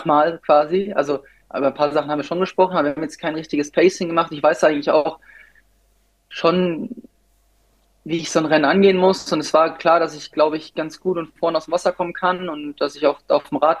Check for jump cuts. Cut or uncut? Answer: uncut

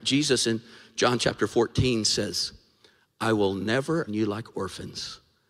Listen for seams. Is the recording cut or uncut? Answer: cut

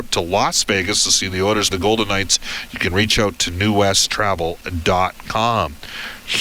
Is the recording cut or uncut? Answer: cut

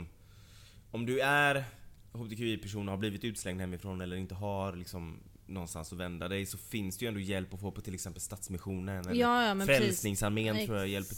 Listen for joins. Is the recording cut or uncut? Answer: uncut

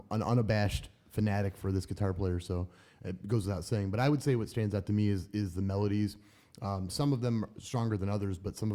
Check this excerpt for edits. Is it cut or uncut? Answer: uncut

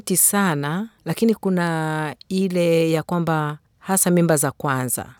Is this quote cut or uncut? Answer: cut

